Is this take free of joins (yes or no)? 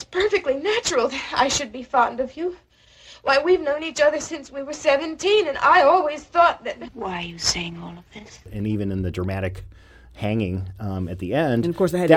yes